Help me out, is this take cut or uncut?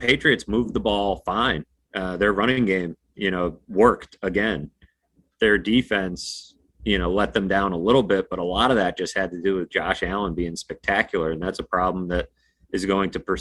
uncut